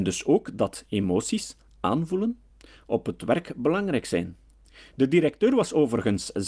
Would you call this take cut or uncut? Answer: uncut